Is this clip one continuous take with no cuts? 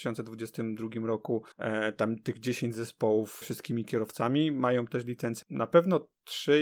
no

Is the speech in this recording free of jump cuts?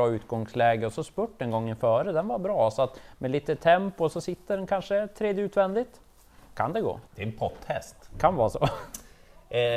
no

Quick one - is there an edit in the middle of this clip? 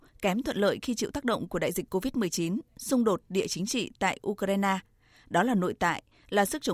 no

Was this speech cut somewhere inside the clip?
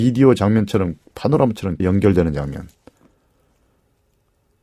yes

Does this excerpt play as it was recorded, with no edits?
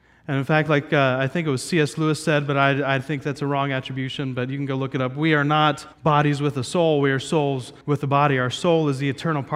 no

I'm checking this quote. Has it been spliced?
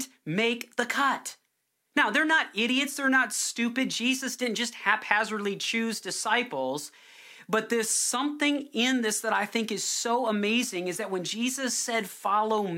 no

